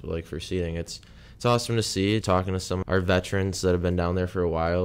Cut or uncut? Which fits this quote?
cut